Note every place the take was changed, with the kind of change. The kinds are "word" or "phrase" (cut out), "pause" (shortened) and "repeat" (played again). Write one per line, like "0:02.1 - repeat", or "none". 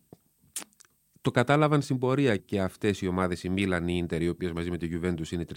0:02.4 - word